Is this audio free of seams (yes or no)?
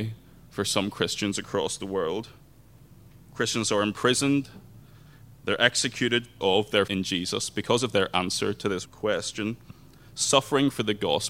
no